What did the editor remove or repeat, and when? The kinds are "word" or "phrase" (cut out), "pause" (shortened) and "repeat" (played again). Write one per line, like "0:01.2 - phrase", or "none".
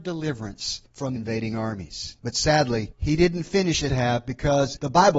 0:01.2 - word
0:02.2 - pause
0:03.9 - phrase